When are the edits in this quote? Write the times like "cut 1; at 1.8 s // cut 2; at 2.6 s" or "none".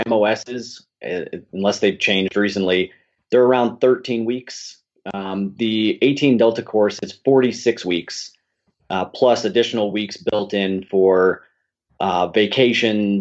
none